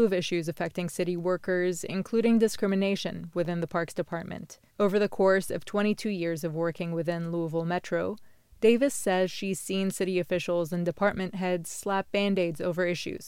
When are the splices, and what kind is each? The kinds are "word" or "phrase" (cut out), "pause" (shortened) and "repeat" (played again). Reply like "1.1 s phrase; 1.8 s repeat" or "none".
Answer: 4.7 s pause